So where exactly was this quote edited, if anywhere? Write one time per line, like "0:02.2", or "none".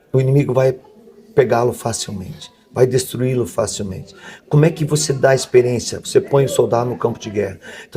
none